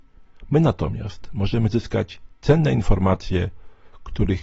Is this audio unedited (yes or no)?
yes